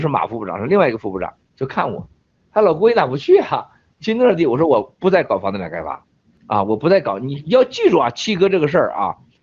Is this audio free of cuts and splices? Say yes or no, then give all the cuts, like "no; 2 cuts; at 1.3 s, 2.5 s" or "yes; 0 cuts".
yes; 0 cuts